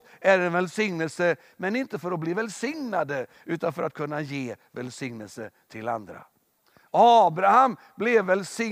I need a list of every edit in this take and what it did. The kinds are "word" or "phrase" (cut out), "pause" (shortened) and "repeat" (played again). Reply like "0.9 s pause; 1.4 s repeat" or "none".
none